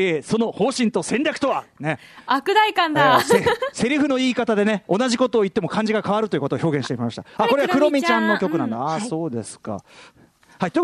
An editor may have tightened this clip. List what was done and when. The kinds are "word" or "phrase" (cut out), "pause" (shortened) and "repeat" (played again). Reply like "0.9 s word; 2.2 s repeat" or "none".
none